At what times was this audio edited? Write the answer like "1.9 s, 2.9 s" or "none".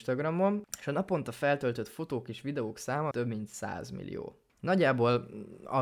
3.1 s